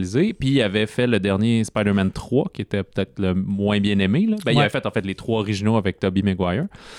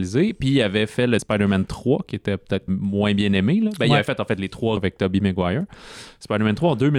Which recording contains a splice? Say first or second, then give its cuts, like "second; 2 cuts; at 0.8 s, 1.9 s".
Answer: second; 3 cuts; at 1.2 s, 2.7 s, 4.8 s